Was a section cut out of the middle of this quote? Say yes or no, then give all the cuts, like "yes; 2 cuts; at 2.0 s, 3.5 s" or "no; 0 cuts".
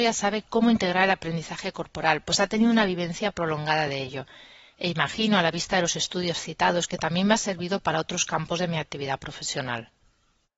no; 0 cuts